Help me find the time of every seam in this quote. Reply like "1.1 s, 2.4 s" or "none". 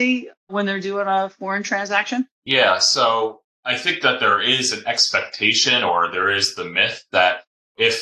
2.3 s